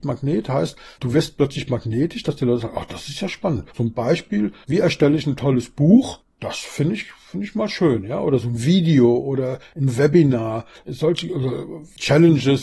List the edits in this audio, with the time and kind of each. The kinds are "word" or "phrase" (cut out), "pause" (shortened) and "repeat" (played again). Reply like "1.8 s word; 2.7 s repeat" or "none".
3.7 s pause